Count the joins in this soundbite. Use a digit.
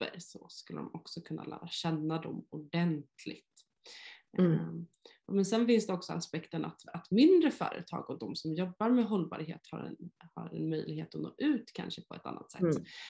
0